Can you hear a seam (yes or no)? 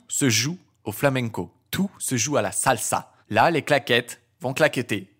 yes